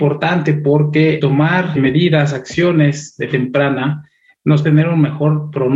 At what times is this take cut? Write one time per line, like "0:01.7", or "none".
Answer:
0:03.3
0:04.6